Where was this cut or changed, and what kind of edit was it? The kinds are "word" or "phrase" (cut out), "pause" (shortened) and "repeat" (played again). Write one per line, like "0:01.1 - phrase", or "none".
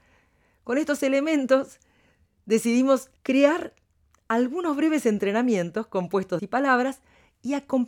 0:03.2 - pause
0:06.4 - phrase